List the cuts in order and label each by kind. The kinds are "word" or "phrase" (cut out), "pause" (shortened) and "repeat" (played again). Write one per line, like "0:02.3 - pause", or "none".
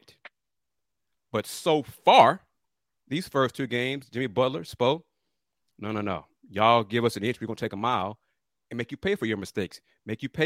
none